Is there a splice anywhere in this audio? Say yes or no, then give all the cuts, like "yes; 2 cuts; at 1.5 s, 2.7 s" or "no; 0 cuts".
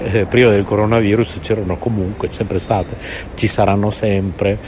yes; 1 cut; at 2.3 s